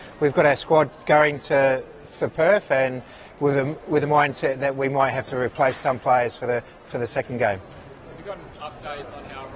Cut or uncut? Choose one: uncut